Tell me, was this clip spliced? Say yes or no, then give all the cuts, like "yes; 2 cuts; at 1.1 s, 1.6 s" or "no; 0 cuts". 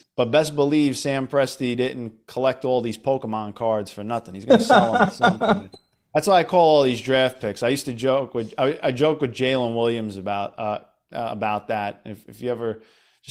no; 0 cuts